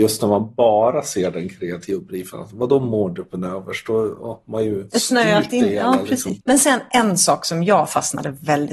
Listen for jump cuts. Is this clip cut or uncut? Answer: uncut